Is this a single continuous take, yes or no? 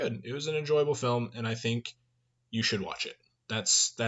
yes